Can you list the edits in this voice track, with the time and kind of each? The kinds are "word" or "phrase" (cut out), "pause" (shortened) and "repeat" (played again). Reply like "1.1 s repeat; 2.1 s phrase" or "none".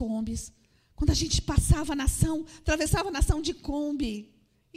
none